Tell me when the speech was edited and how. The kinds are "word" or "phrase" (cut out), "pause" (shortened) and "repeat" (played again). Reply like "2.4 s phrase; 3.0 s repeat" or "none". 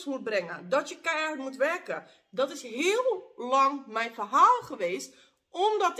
none